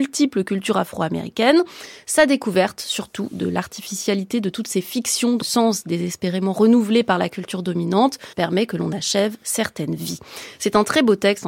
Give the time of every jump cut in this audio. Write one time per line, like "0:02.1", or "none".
0:05.4
0:08.3